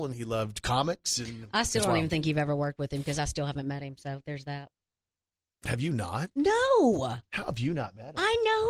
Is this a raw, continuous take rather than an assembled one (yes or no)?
yes